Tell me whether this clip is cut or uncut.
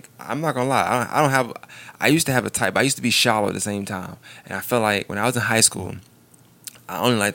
uncut